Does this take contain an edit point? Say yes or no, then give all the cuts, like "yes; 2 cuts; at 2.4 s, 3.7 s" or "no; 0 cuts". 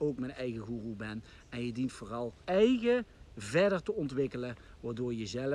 yes; 1 cut; at 2.4 s